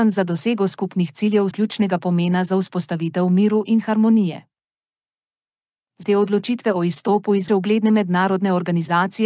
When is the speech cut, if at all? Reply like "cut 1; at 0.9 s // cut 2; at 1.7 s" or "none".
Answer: cut 1; at 1.5 s // cut 2; at 6.0 s // cut 3; at 7.5 s